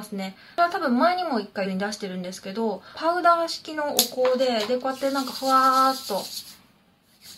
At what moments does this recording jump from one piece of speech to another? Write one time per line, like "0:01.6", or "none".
0:01.6

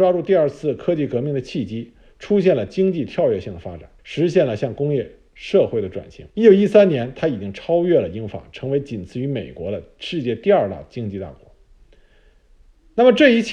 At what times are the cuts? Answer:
0:04.0
0:06.3

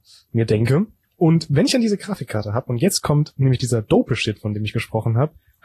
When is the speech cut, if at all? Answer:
none

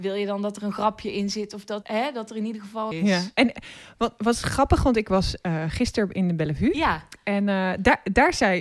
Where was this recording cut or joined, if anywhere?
0:01.8
0:02.9

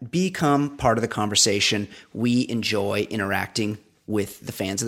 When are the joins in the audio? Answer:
none

